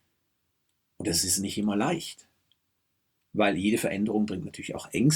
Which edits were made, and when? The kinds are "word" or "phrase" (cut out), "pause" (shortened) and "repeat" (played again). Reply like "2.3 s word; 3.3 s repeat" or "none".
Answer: none